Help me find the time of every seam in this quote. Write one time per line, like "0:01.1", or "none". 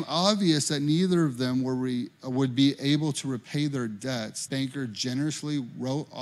0:04.5